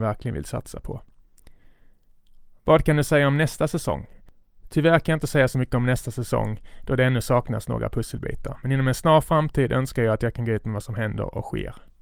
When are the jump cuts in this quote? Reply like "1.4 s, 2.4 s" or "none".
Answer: none